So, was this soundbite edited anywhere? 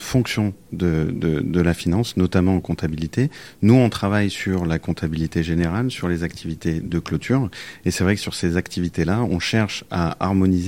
no; 0 cuts

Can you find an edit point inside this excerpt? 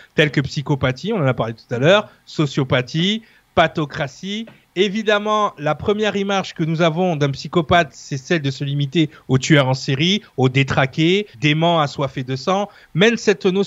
yes; 1 cut; at 11.3 s

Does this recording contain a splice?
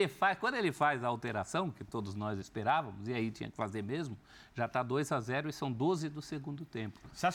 no; 0 cuts

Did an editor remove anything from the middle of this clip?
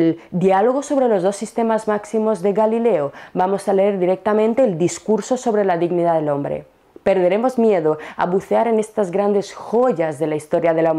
no; 0 cuts

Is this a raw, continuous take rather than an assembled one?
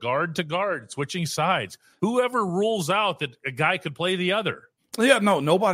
yes; 0 cuts

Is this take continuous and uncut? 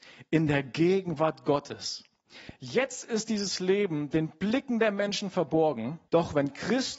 no; 1 cut; at 6.1 s

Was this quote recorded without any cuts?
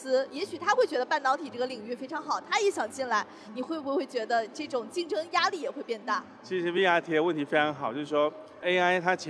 yes; 0 cuts

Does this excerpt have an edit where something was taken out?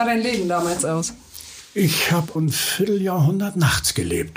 yes; 1 cut; at 2.4 s

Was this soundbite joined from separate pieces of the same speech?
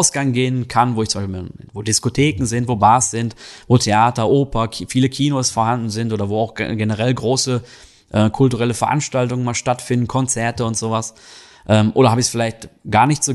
no; 0 cuts

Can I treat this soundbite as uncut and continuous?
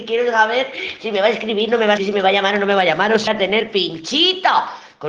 no; 2 cuts; at 2.0 s, 3.3 s

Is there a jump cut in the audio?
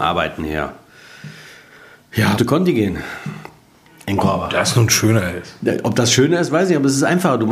yes; 1 cut; at 2.4 s

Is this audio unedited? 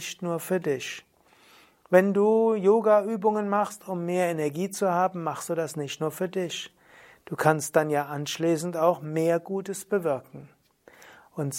yes; 0 cuts

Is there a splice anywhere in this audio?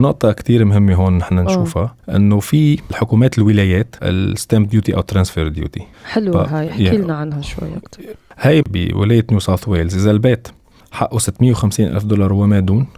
yes; 4 cuts; at 2.0 s, 4.0 s, 5.9 s, 8.6 s

